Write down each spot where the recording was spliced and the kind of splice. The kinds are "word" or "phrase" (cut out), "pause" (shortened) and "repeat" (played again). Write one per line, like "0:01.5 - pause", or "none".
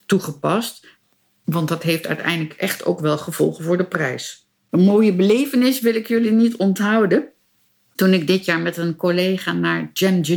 0:04.6 - pause